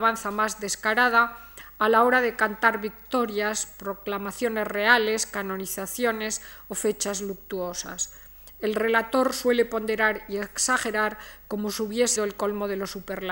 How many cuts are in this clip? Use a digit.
1